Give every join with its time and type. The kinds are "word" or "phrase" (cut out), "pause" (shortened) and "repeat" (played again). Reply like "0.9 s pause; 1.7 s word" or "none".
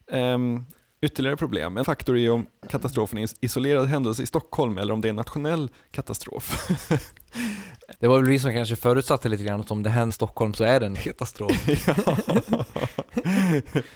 1.8 s word; 7.9 s word; 10.1 s word; 10.9 s word